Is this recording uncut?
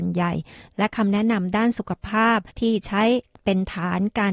no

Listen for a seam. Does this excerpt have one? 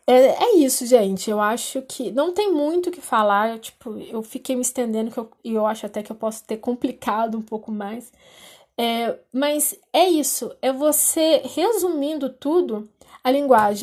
yes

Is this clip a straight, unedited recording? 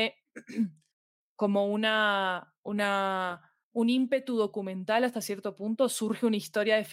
no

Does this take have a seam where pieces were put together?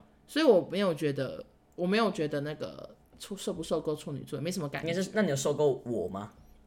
no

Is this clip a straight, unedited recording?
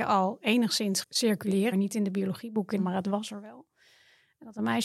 no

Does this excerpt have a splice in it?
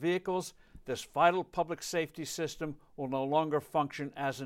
no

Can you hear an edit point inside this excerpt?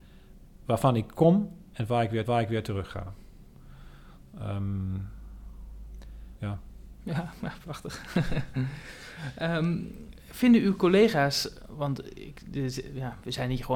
yes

